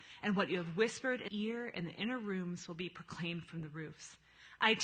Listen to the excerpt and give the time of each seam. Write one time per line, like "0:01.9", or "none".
0:01.3